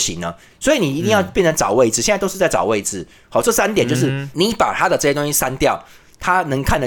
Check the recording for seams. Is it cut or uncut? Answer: uncut